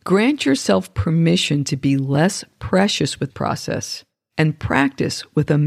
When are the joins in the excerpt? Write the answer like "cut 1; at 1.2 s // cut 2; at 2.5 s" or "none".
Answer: cut 1; at 3.3 s